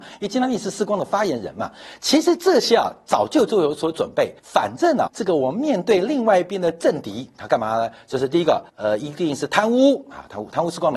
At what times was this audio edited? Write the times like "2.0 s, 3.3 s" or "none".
4.4 s, 5.1 s, 8.7 s